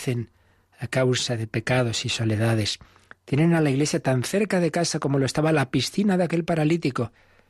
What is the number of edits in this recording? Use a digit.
0